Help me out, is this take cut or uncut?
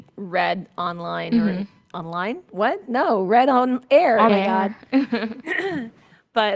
cut